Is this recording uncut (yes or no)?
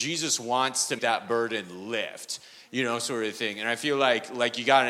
no